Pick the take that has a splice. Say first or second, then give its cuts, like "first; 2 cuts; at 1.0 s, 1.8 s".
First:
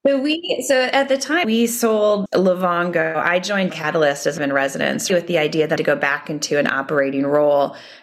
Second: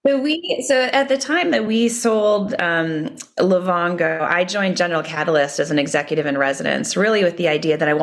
first; 6 cuts; at 1.4 s, 2.3 s, 3.7 s, 4.4 s, 5.1 s, 5.8 s